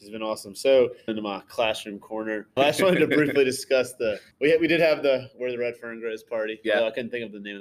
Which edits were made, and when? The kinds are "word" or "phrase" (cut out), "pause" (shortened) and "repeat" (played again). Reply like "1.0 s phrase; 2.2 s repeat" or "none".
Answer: 1.1 s word; 2.6 s word; 4.3 s pause